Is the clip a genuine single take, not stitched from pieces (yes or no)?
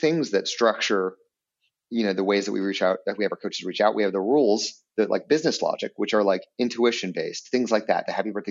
yes